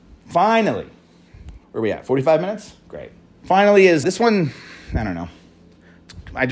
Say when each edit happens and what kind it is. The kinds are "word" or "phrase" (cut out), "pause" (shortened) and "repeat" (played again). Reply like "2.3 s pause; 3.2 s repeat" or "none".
1.6 s pause; 3.2 s pause; 4.0 s word